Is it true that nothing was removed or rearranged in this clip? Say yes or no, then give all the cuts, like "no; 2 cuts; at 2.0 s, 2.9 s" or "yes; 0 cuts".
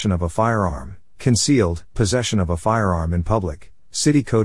no; 1 cut; at 1.9 s